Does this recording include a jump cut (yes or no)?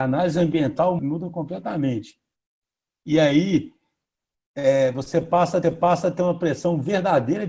yes